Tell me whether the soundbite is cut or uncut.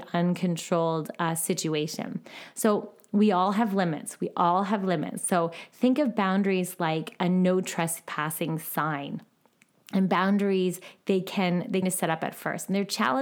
cut